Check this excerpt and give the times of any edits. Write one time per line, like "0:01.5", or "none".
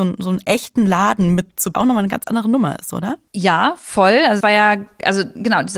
0:01.7
0:03.3
0:04.4